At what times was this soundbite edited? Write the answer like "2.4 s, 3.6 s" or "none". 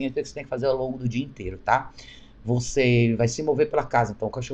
none